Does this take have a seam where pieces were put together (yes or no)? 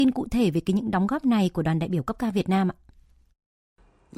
no